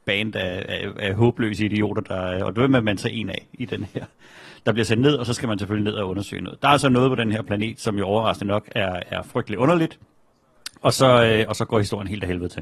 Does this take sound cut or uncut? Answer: uncut